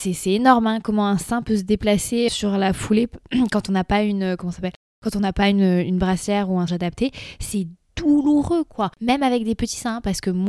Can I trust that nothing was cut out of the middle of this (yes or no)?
no